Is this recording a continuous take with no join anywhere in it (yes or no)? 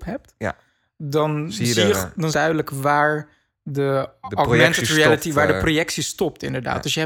no